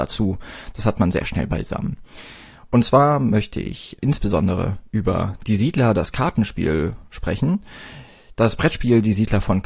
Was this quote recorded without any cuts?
no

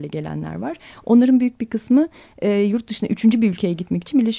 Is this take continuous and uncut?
yes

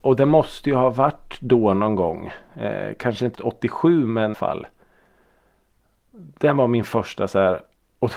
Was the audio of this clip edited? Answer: yes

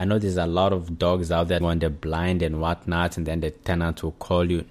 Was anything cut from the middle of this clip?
yes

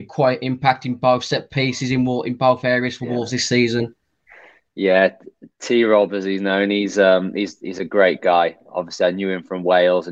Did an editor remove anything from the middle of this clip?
no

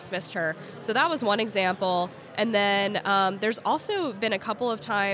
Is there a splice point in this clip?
no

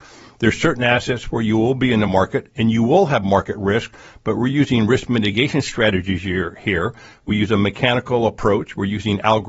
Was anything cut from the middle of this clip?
no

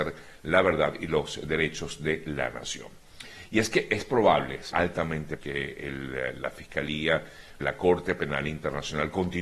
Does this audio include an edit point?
yes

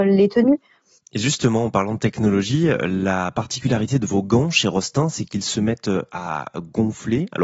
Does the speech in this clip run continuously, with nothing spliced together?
yes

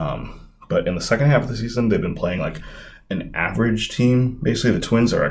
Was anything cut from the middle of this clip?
no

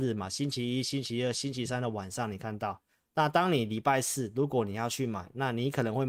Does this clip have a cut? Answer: no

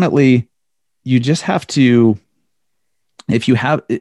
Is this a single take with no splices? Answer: yes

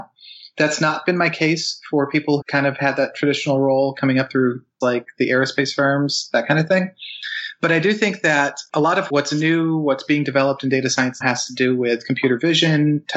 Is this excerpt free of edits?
no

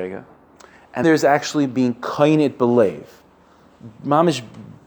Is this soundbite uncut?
no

